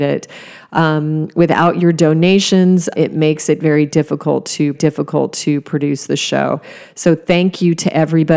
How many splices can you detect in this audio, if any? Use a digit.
2